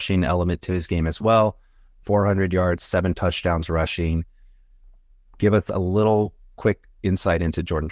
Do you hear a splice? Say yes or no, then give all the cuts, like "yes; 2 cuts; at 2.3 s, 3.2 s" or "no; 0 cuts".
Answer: no; 0 cuts